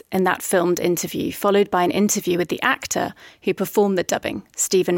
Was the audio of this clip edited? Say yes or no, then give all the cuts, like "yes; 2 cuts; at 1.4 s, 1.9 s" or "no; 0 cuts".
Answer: no; 0 cuts